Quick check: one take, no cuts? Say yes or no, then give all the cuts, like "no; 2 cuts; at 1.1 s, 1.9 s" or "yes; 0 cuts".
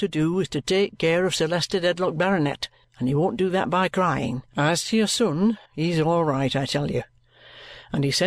no; 3 cuts; at 2.8 s, 4.5 s, 5.7 s